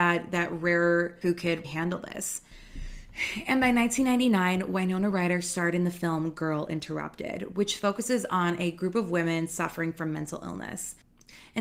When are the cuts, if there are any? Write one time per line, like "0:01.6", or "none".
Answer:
0:01.2
0:01.6